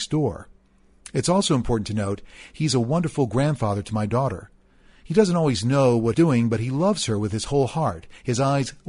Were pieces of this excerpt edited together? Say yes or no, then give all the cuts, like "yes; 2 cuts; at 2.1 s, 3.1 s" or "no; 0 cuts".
yes; 1 cut; at 6.1 s